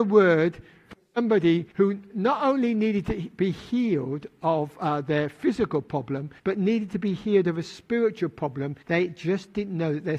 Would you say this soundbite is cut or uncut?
cut